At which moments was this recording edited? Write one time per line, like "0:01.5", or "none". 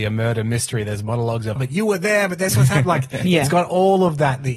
0:01.6
0:02.5